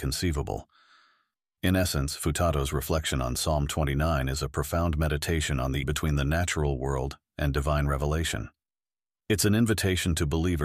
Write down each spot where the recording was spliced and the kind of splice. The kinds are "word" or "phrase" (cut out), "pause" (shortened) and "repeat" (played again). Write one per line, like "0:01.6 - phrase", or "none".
0:05.8 - word